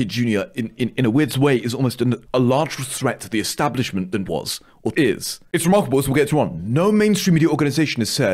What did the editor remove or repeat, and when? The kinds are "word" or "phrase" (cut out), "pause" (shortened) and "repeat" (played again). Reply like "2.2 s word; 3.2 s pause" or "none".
2.3 s word; 4.3 s word; 4.9 s word; 5.5 s pause; 6.3 s word